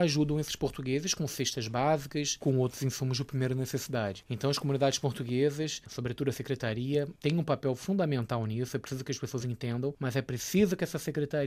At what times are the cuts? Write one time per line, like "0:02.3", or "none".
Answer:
none

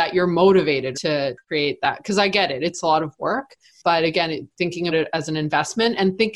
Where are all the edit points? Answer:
0:00.9
0:04.9

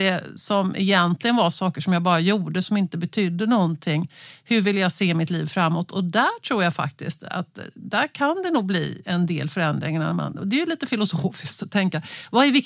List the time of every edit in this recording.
0:09.0
0:11.6

